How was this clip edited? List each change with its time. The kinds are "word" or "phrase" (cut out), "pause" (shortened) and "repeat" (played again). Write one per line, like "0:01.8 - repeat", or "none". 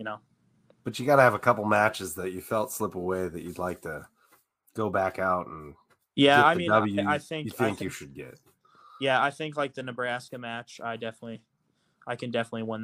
none